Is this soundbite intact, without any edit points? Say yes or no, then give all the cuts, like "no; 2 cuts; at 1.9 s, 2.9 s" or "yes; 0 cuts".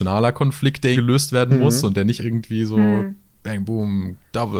no; 3 cuts; at 0.9 s, 2.2 s, 3.6 s